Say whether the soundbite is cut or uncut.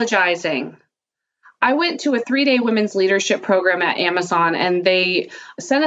uncut